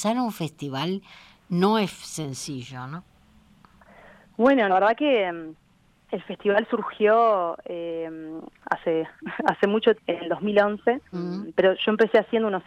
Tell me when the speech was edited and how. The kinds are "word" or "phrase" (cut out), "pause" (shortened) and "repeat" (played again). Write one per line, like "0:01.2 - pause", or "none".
0:04.7 - word
0:08.6 - word
0:09.9 - word
0:11.1 - word

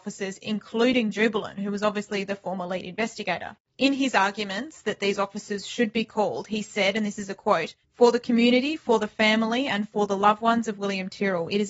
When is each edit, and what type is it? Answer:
0:07.8 - pause

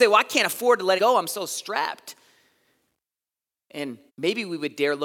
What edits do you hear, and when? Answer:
0:01.0 - phrase
0:04.1 - pause

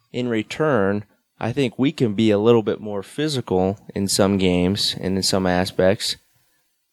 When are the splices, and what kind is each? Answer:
none

